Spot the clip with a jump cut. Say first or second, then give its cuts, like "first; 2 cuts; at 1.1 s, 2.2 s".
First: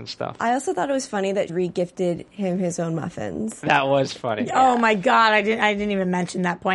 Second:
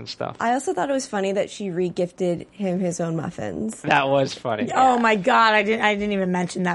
first; 1 cut; at 1.5 s